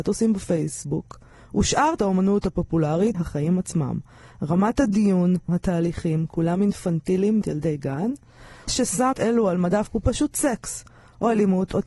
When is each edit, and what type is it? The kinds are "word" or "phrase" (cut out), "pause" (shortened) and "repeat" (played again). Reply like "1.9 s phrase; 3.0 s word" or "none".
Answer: 2.0 s word; 3.1 s word; 5.5 s word; 7.4 s word; 8.7 s word; 9.1 s word; 9.9 s word